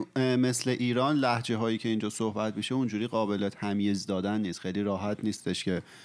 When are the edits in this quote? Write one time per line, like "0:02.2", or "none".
none